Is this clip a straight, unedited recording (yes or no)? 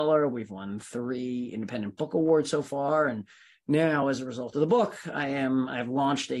yes